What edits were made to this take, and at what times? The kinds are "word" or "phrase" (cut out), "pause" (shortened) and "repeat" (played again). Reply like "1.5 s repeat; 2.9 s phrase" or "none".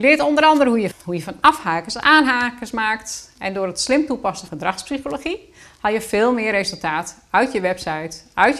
0.9 s phrase; 4.5 s word